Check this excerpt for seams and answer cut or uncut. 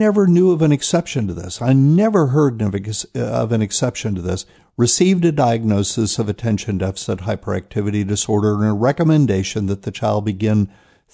uncut